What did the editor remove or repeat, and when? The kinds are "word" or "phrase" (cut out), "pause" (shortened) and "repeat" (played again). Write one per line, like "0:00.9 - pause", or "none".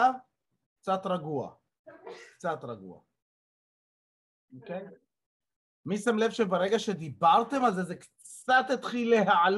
none

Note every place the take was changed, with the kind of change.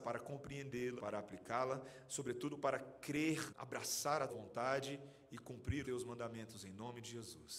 0:01.0 - word
0:03.5 - word
0:04.3 - word
0:05.8 - word

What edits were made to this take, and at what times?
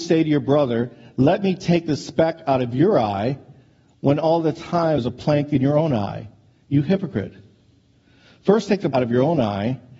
0:05.0 - word
0:08.9 - word

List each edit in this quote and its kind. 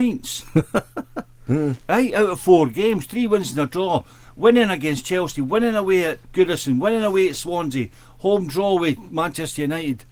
0:06.2 - word

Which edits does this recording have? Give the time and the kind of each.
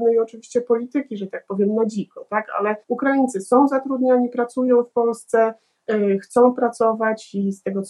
0:02.8 - pause

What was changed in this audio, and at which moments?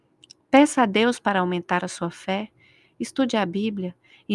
none

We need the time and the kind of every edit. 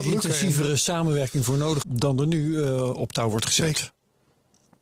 0:01.8 - word

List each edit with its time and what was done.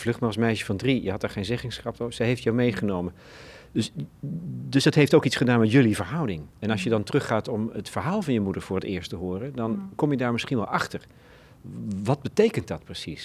0:06.5 - pause

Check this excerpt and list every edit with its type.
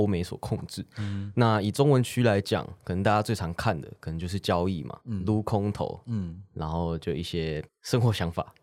0:05.0 - pause
0:07.7 - pause

